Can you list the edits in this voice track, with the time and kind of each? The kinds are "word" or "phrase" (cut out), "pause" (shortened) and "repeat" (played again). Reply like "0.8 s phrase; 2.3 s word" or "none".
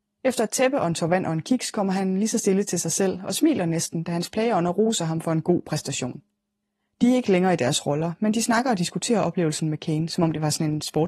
none